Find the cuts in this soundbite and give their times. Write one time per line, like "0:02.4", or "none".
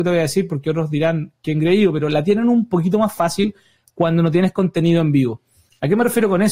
none